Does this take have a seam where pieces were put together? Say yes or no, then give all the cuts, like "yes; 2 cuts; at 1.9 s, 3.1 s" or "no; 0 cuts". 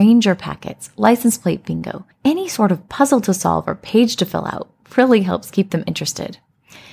yes; 1 cut; at 2.1 s